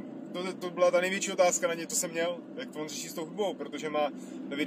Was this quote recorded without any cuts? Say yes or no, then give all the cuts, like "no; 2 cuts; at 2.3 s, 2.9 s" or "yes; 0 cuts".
yes; 0 cuts